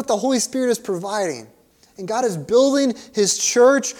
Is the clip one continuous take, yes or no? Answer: no